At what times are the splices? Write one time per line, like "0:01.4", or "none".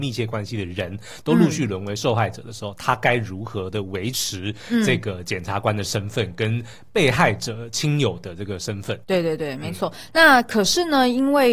0:09.0

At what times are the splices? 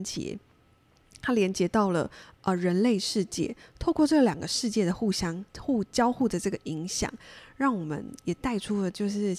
0:05.5

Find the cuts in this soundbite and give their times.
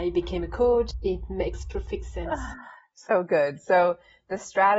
none

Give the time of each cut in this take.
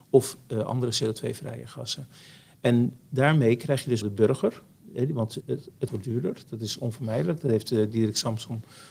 0:04.0
0:05.4
0:05.9

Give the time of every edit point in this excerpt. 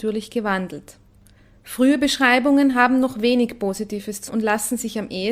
0:04.3

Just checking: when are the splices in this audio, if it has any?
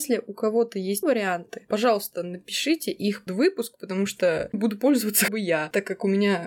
0:01.0
0:03.3
0:04.5
0:05.3

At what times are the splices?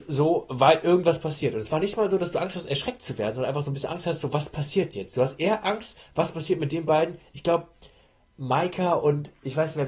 none

